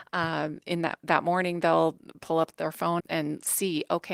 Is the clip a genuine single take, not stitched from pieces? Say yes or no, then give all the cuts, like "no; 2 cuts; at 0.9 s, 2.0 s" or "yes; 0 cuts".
no; 1 cut; at 3.0 s